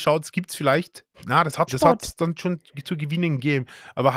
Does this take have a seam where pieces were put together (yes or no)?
yes